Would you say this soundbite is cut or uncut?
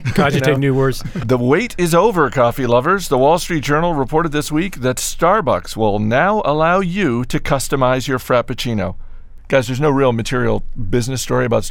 uncut